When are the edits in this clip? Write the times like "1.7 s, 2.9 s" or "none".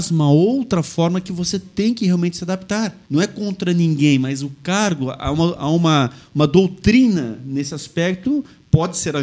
3.1 s

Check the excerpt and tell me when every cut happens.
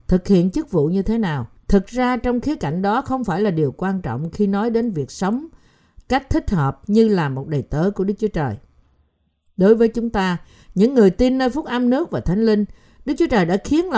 1.6 s

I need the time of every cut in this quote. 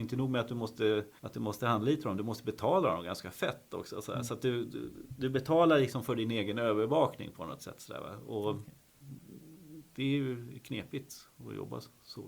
1.2 s

